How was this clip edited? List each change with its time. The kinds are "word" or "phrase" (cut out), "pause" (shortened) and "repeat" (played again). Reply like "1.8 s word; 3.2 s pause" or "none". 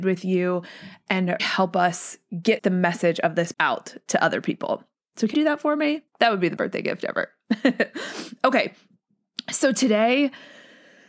1.4 s word; 2.6 s phrase; 3.5 s word; 5.3 s word; 6.1 s pause; 6.6 s word